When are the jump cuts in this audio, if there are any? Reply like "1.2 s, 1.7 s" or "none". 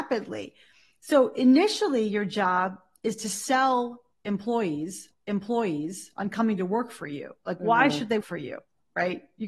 5.1 s, 8.2 s